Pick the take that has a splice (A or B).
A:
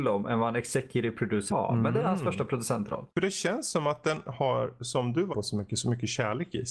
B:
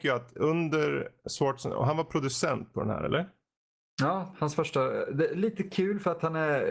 A